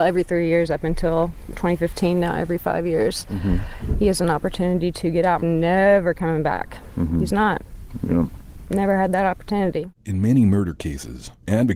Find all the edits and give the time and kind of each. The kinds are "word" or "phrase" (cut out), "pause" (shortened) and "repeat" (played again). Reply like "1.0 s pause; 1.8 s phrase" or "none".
5.4 s phrase; 9.9 s pause